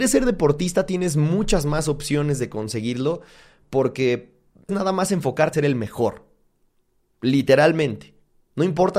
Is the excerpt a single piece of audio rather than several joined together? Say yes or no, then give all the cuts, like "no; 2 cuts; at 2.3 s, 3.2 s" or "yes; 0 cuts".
no; 2 cuts; at 4.7 s, 5.5 s